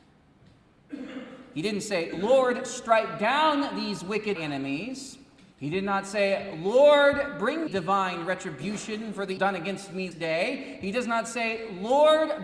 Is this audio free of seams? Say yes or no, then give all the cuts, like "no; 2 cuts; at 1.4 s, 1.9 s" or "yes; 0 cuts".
no; 5 cuts; at 4.4 s, 5.5 s, 7.7 s, 9.4 s, 10.1 s